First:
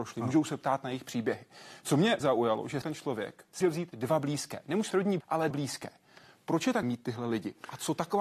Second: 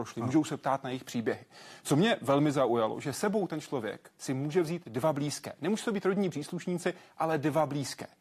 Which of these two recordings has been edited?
first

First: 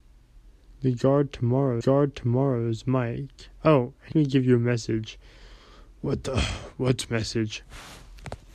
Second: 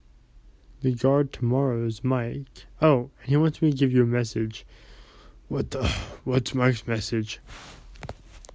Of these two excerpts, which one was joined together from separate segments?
first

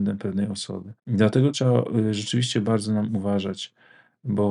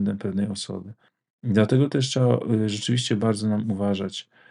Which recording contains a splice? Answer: first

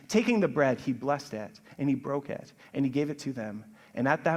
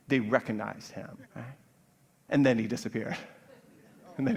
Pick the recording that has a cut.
second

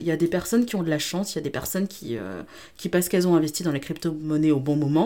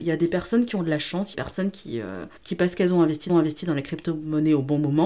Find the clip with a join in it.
second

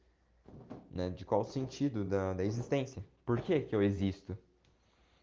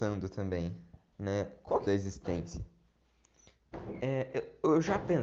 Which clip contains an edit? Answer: second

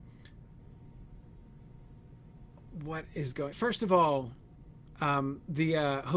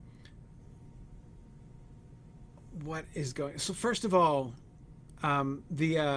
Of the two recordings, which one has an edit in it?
first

